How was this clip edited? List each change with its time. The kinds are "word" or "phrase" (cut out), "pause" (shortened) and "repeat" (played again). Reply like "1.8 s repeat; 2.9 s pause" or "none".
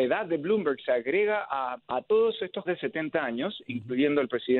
1.8 s pause; 2.7 s phrase